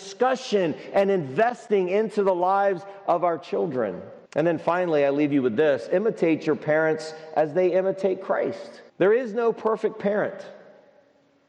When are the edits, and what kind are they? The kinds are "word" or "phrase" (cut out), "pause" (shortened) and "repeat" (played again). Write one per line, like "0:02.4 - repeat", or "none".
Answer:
0:04.3 - pause
0:08.9 - pause